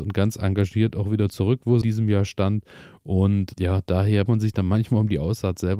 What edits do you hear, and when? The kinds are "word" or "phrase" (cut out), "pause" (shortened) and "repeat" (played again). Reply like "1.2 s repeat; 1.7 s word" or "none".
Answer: 1.8 s word; 3.5 s word; 4.3 s word